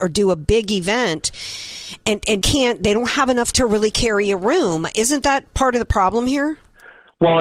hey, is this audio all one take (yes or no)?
no